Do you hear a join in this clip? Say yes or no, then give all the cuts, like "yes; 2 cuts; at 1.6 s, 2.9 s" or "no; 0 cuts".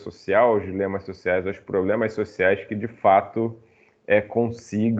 no; 0 cuts